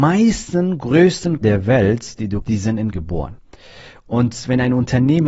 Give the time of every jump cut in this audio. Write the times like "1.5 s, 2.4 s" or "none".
1.4 s, 2.4 s, 2.9 s